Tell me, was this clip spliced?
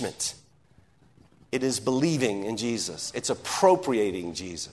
no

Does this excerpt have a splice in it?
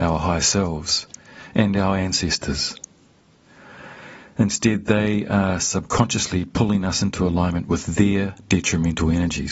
no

